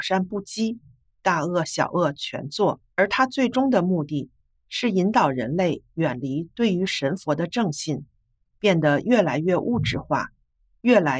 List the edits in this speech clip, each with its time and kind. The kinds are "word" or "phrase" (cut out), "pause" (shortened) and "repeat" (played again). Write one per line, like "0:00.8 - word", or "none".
0:02.9 - pause

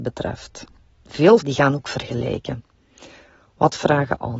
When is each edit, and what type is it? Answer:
0:01.4 - word

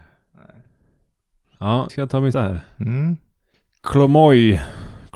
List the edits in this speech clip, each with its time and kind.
0:01.9 - word
0:02.3 - word

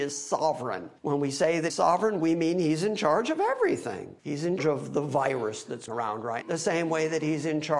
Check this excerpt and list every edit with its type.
0:01.0 - pause
0:01.7 - word
0:04.2 - pause
0:04.6 - word
0:05.9 - word
0:06.4 - word

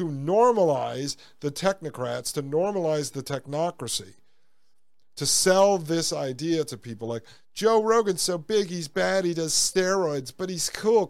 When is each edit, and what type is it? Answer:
none

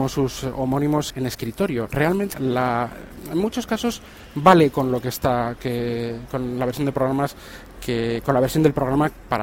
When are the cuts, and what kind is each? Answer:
0:01.1 - word
0:02.3 - word
0:05.6 - phrase

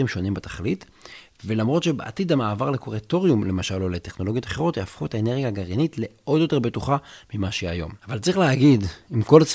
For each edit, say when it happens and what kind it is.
0:08.0 - pause

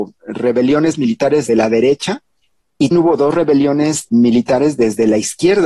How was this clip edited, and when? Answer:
0:01.5 - word
0:02.9 - word
0:04.1 - word

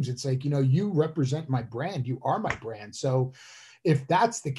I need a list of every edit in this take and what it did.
none

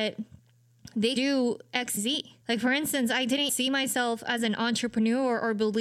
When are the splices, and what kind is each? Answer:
0:01.2 - word
0:02.0 - phrase
0:02.4 - pause
0:03.5 - word

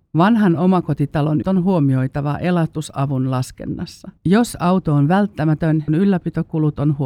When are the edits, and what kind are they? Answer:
0:01.4 - word
0:04.2 - pause
0:05.9 - phrase

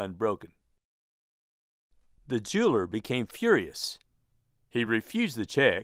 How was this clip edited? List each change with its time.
none

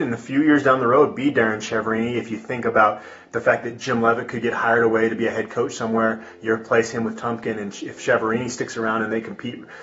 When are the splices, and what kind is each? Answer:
none

